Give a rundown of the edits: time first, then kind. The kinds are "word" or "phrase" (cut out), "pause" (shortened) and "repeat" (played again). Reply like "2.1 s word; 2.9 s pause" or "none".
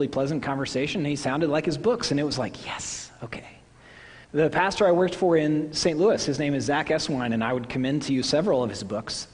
4.2 s pause